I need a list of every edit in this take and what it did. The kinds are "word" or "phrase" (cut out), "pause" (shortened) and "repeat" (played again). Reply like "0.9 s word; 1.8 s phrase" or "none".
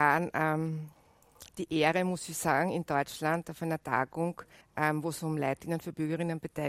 4.6 s pause